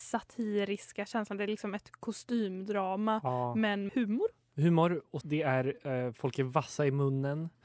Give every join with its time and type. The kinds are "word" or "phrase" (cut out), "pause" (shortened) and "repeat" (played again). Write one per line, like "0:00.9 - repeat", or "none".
0:03.9 - phrase
0:05.2 - word